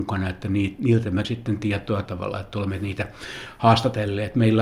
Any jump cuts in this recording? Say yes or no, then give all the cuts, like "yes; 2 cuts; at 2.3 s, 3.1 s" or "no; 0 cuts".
yes; 2 cuts; at 1.2 s, 2.0 s